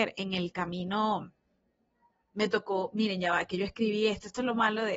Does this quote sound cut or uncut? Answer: uncut